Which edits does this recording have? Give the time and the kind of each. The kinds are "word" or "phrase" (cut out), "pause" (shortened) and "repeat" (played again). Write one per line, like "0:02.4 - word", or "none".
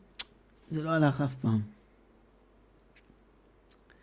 none